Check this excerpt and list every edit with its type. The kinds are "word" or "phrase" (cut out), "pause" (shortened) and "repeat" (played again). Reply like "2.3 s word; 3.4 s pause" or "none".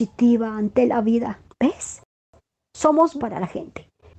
3.2 s word